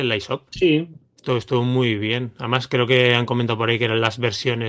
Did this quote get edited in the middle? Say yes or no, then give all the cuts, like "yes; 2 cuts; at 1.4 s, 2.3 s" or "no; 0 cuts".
no; 0 cuts